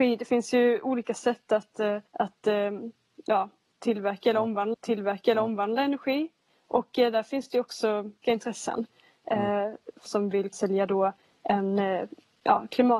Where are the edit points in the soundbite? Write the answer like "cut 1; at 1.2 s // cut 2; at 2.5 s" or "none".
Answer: cut 1; at 2.1 s // cut 2; at 4.7 s // cut 3; at 8.2 s // cut 4; at 10.1 s // cut 5; at 10.5 s